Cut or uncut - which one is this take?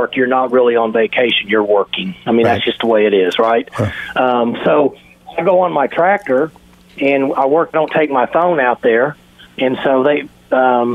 cut